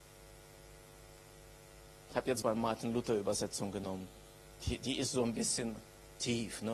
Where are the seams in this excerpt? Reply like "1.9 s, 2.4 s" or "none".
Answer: 2.4 s